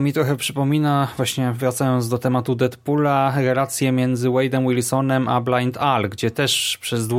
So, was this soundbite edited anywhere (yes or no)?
no